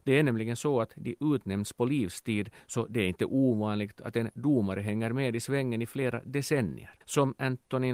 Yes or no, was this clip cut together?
yes